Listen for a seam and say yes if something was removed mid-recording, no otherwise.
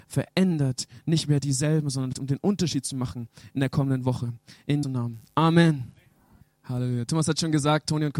yes